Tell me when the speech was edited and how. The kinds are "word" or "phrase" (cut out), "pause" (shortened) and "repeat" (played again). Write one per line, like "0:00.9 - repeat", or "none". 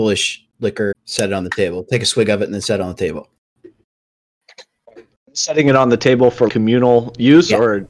0:00.9 - word
0:06.5 - word